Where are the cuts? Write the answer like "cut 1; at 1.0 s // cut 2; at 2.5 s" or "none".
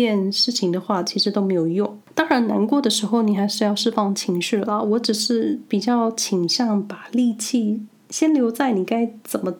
cut 1; at 2.0 s